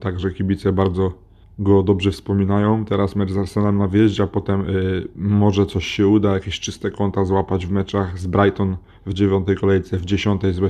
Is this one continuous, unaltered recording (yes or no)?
no